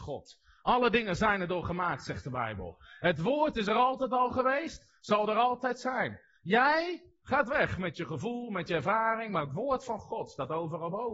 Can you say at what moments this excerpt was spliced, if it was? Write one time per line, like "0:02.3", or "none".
none